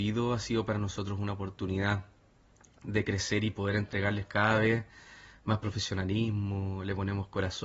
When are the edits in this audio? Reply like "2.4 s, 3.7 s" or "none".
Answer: none

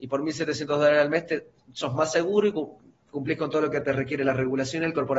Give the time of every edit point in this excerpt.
none

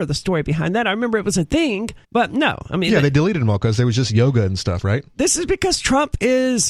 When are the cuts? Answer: 2.0 s

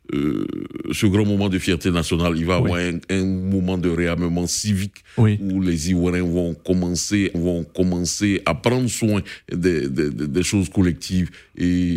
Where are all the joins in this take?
7.3 s

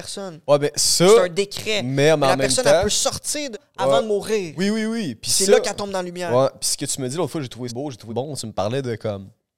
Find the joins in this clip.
3.5 s, 7.7 s, 8.1 s

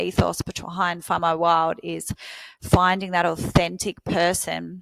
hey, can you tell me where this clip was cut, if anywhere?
none

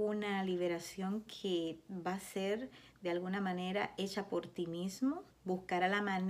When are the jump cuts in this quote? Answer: 5.3 s

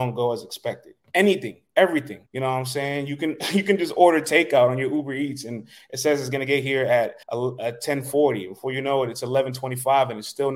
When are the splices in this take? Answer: 1.0 s, 2.3 s, 7.2 s

